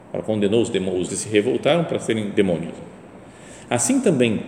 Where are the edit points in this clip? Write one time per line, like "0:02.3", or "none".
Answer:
0:01.1